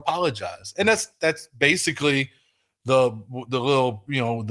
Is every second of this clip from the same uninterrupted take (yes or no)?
yes